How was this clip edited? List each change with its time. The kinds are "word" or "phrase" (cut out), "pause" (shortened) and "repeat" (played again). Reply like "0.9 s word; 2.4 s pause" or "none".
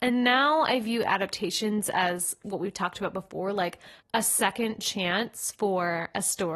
4.0 s pause